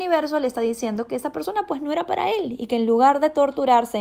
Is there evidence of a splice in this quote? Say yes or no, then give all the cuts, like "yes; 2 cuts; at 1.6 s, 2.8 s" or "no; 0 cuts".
no; 0 cuts